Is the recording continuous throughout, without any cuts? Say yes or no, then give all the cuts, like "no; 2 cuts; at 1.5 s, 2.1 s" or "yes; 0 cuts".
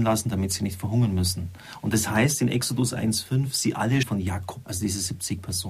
no; 2 cuts; at 4.0 s, 4.6 s